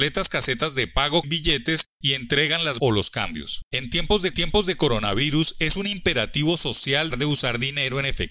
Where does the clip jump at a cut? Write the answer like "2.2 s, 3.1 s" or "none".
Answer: 1.2 s, 2.8 s, 3.7 s, 4.3 s, 7.1 s